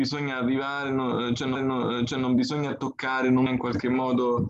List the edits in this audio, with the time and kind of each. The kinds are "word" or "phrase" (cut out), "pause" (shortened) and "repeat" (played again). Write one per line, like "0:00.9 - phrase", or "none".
0:01.5 - repeat
0:03.5 - word